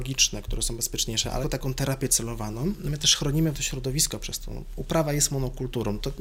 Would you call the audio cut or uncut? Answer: cut